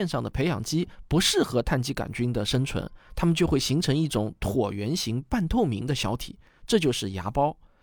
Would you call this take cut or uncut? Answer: uncut